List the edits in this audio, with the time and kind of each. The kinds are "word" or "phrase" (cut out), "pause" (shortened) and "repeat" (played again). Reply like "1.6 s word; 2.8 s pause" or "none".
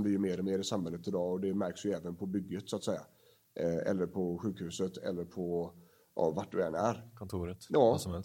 none